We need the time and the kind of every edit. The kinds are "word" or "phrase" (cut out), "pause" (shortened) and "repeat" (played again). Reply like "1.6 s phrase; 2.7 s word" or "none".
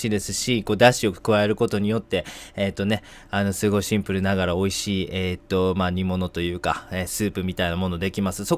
none